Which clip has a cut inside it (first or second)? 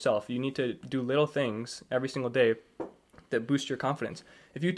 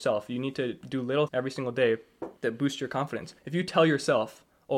second